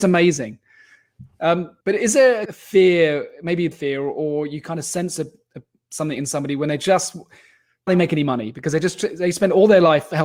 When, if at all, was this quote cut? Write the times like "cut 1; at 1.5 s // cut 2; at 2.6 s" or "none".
cut 1; at 1.8 s // cut 2; at 2.5 s // cut 3; at 3.7 s // cut 4; at 7.9 s